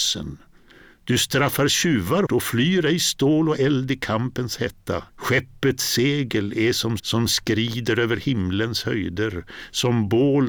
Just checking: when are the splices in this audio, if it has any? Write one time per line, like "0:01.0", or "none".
0:02.3
0:05.1
0:07.0

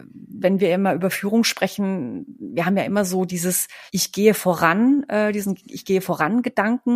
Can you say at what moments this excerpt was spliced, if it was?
0:03.9

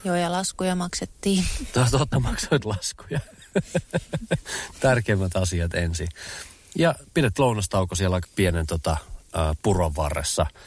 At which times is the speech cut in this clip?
0:02.1
0:04.8
0:07.4
0:08.2

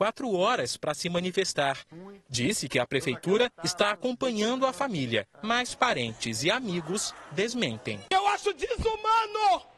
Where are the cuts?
0:05.3

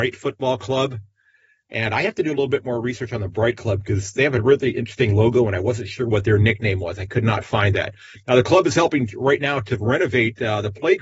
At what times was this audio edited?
none

